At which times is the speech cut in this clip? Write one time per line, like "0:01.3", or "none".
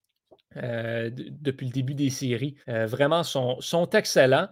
0:02.6